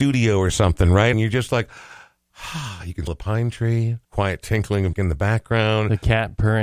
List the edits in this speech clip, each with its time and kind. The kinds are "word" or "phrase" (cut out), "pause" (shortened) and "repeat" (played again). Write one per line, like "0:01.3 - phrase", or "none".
0:01.1 - word
0:03.1 - word
0:04.0 - pause
0:04.9 - word